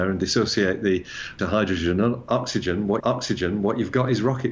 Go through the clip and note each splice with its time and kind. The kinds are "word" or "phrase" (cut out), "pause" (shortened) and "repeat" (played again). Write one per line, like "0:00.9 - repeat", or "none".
0:01.4 - phrase
0:03.0 - repeat